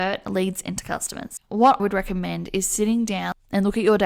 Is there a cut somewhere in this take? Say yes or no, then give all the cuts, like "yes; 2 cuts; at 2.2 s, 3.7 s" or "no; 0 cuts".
yes; 1 cut; at 1.8 s